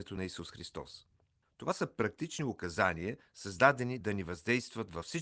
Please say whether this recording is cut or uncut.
uncut